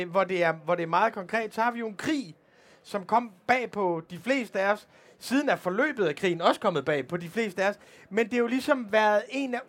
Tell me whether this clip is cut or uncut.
uncut